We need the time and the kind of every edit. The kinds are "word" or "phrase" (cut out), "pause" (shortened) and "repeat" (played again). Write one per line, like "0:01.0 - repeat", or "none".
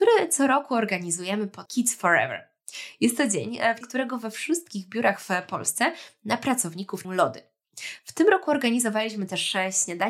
0:01.7 - word
0:03.8 - word
0:07.0 - word